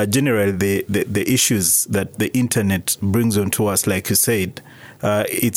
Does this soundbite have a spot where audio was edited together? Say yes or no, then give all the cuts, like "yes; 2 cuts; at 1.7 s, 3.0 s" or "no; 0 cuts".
no; 0 cuts